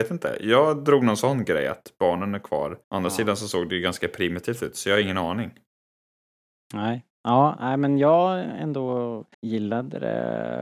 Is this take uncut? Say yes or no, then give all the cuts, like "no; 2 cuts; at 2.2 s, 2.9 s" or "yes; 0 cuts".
no; 3 cuts; at 2.8 s, 7.1 s, 9.3 s